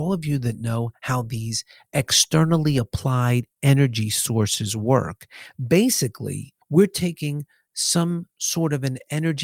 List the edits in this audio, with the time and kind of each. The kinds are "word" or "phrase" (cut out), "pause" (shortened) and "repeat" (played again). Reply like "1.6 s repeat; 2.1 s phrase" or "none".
6.6 s pause; 8.3 s pause